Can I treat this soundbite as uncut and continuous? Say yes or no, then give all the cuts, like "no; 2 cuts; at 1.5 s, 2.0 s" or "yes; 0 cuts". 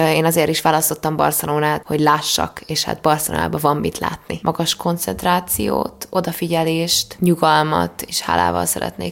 no; 1 cut; at 1.8 s